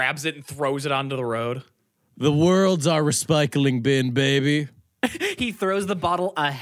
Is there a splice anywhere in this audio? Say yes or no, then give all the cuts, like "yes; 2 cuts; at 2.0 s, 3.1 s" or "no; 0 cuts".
no; 0 cuts